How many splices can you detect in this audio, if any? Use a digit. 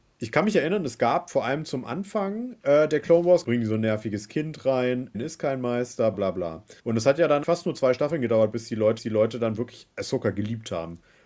6